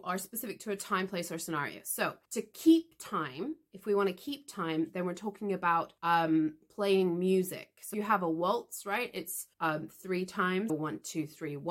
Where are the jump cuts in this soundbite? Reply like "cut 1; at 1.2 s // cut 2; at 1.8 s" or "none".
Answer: cut 1; at 2.2 s // cut 2; at 6.0 s // cut 3; at 7.9 s // cut 4; at 9.5 s // cut 5; at 10.7 s